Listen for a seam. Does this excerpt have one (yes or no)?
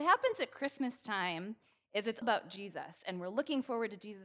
yes